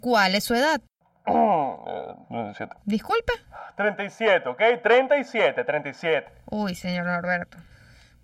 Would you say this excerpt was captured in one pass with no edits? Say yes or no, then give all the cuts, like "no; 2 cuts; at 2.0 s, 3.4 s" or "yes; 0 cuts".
no; 2 cuts; at 2.2 s, 2.8 s